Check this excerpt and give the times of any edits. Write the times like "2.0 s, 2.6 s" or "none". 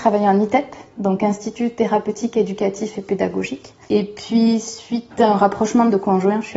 none